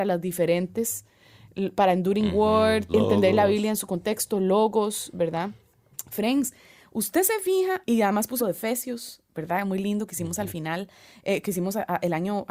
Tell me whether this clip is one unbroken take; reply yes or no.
no